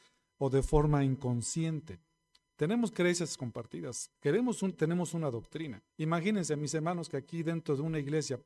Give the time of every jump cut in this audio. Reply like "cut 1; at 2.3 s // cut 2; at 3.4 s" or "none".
cut 1; at 4.2 s // cut 2; at 5.9 s